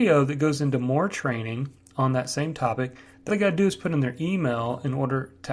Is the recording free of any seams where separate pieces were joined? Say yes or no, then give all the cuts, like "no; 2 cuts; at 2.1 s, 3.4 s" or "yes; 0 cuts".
no; 1 cut; at 3.3 s